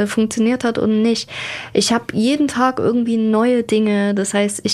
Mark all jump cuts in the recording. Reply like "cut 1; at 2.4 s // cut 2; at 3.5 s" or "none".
none